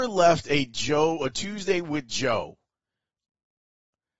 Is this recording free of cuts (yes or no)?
yes